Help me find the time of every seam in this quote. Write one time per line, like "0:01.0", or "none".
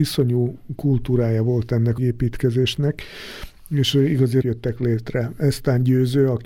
0:02.0
0:04.4